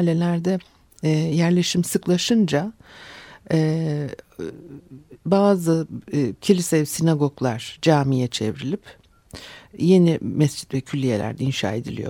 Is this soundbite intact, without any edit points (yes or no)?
yes